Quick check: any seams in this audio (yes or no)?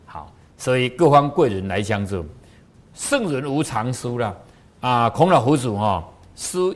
no